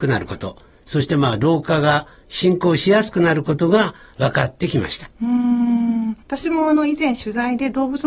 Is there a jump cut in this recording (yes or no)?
yes